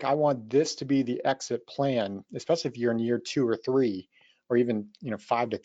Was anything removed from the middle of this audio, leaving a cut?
no; 0 cuts

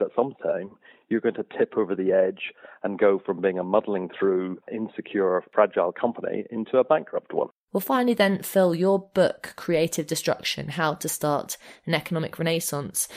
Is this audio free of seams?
no; 1 cut; at 4.6 s

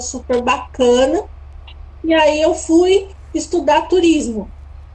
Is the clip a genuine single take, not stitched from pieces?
yes; 0 cuts

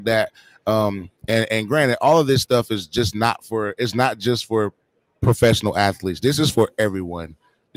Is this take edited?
yes; 1 cut; at 1.2 s

